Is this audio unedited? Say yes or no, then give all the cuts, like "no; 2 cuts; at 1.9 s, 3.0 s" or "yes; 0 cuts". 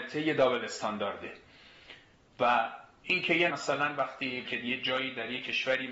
no; 2 cuts; at 3.5 s, 4.4 s